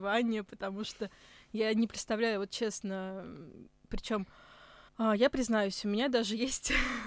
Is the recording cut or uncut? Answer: cut